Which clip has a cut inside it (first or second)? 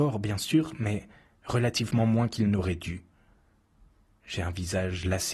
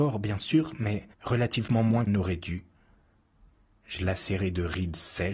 second